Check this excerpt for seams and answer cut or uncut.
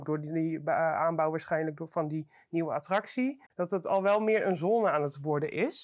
cut